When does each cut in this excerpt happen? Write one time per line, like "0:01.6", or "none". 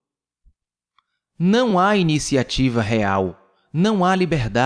none